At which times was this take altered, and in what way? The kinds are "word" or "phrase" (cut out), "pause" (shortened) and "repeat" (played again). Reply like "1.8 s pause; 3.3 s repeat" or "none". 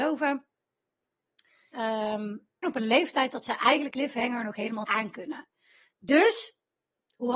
1.7 s word; 2.6 s word; 3.9 s word; 4.8 s word